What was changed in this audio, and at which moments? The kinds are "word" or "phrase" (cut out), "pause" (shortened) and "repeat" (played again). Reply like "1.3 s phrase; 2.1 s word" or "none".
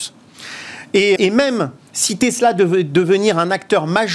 1.2 s word